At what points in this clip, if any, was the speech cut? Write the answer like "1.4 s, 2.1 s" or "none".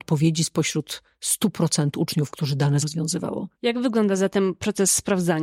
2.8 s, 3.5 s